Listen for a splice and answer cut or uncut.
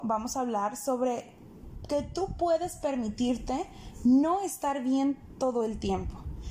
uncut